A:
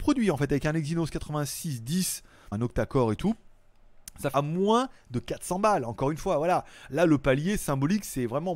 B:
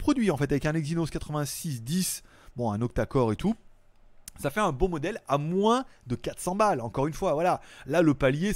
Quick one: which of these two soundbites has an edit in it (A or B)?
A